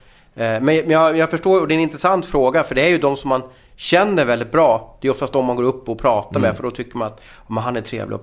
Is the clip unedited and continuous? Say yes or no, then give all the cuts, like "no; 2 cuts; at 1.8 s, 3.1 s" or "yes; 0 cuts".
yes; 0 cuts